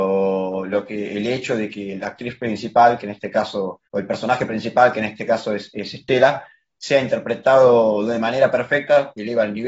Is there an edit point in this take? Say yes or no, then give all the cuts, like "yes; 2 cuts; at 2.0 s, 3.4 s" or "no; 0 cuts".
yes; 1 cut; at 3.9 s